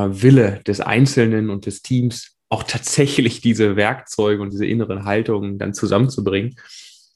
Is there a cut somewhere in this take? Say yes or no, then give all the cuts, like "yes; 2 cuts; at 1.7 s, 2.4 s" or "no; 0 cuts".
no; 0 cuts